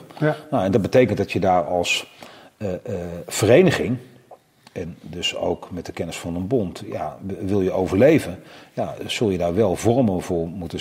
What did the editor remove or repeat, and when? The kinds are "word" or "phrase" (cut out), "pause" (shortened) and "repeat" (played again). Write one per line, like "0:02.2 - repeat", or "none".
none